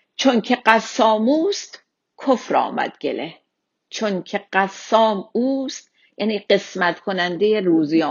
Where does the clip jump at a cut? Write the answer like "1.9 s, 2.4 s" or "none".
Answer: none